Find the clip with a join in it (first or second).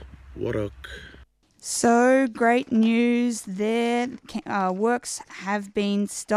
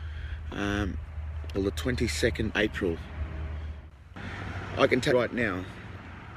second